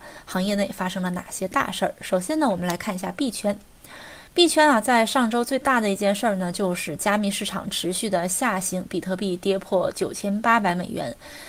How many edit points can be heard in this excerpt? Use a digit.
1